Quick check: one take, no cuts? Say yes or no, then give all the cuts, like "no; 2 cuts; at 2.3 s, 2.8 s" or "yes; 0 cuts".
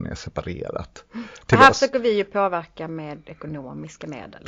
yes; 0 cuts